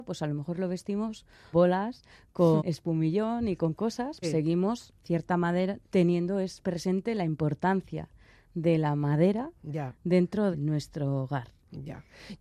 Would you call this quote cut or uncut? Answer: cut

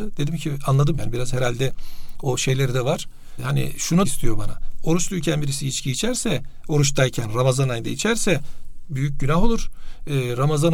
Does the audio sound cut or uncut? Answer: cut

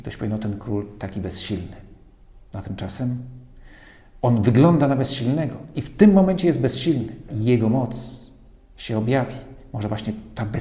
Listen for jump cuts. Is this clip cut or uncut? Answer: cut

